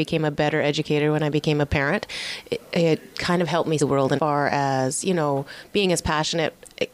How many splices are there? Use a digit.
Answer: 2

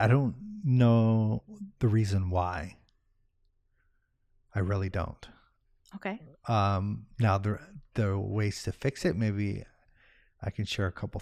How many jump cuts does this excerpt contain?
0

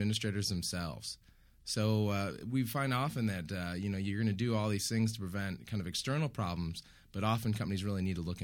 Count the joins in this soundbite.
0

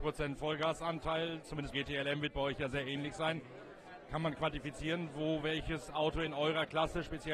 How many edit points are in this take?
1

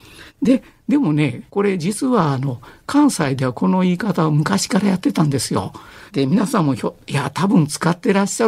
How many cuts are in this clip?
3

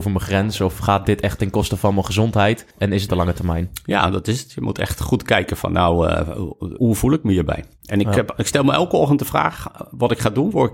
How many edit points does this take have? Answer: 3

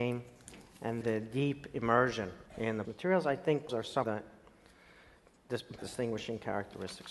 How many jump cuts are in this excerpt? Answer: 6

